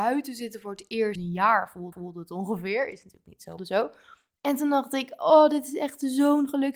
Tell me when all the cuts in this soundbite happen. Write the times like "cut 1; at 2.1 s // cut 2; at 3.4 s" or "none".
cut 1; at 1.2 s // cut 2; at 1.9 s // cut 3; at 3.6 s